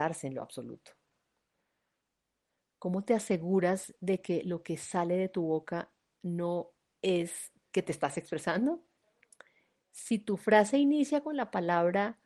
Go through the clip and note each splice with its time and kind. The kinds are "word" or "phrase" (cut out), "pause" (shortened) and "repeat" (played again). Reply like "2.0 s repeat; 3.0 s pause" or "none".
none